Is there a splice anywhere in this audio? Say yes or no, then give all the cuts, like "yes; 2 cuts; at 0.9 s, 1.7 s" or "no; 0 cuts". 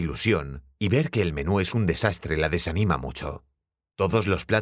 no; 0 cuts